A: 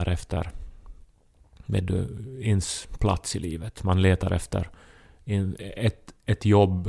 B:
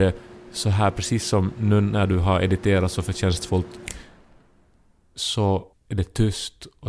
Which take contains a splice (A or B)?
B